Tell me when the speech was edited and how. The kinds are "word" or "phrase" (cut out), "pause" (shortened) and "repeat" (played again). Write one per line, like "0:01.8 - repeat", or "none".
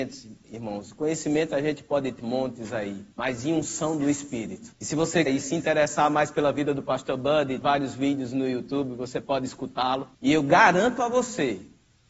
0:02.2 - word
0:03.1 - pause
0:04.7 - pause
0:05.3 - word
0:07.6 - word
0:10.1 - pause